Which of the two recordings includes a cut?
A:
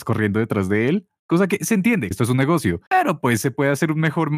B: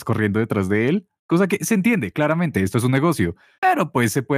A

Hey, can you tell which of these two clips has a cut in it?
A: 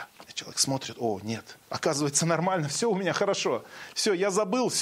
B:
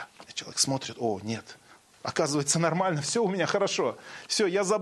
A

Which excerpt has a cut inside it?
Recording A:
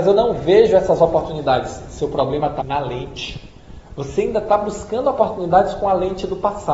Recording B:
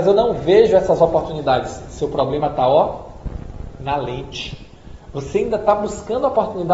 A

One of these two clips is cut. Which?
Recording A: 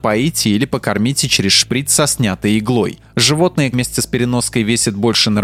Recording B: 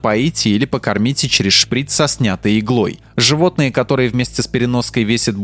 A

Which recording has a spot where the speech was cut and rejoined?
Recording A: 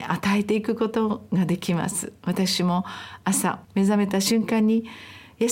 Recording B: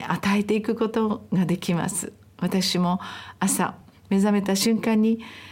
A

